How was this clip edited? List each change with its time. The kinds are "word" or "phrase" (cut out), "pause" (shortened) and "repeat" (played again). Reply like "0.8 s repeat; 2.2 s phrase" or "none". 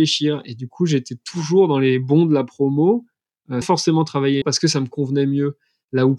3.6 s word; 4.4 s word